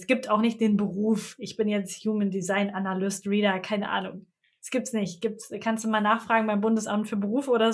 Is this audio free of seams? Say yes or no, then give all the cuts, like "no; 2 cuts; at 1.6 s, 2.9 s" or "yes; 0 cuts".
yes; 0 cuts